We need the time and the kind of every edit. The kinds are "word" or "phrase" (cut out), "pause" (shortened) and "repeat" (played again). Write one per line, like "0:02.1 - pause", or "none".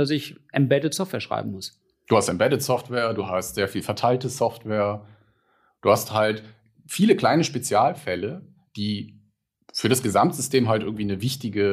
none

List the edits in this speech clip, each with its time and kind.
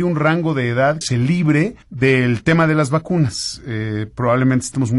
0:01.0 - word
0:01.8 - pause

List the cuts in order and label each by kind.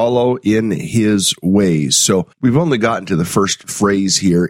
0:02.3 - pause

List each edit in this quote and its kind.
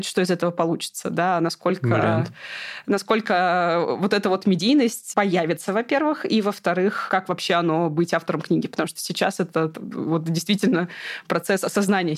none

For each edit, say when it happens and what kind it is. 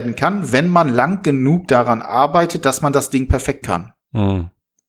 0:03.6 - word

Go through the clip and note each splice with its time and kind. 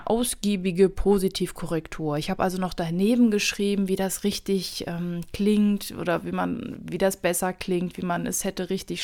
none

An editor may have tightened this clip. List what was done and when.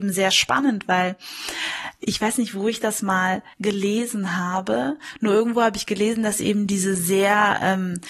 0:03.5 - pause

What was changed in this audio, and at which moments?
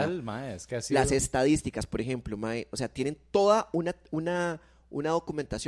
none

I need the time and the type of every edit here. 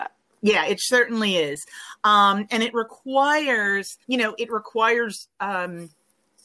0:04.0 - pause

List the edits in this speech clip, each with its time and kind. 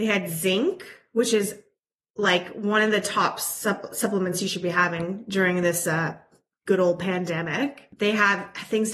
none

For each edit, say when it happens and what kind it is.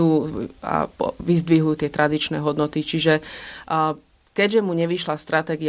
none

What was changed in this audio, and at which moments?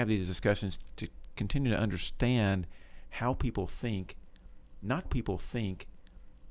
0:05.1 - repeat

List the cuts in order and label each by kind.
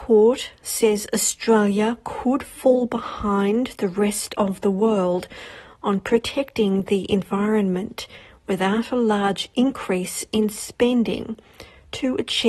none

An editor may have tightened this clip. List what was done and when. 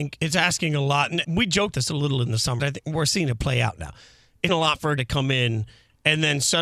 0:01.2 - word
0:01.7 - word
0:02.6 - word
0:04.5 - word
0:05.0 - word

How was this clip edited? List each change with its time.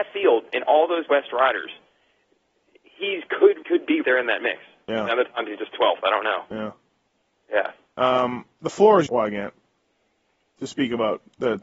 0:01.1 - word
0:03.6 - word
0:04.0 - word
0:09.1 - word

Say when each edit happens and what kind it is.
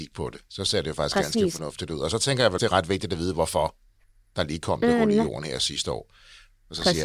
0:02.6 - word

